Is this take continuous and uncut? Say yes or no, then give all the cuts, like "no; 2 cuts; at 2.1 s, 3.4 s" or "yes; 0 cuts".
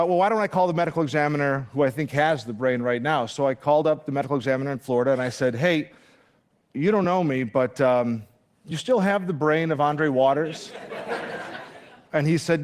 yes; 0 cuts